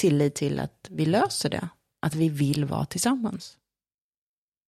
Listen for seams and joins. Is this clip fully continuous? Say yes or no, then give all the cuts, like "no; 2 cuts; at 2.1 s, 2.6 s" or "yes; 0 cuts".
yes; 0 cuts